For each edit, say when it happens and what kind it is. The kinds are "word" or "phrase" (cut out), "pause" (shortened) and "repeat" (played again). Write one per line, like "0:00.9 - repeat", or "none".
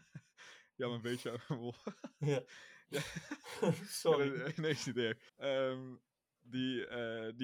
0:05.3 - pause